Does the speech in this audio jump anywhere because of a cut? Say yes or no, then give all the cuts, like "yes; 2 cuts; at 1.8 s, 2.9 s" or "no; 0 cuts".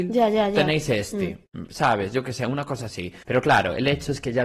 yes; 1 cut; at 3.2 s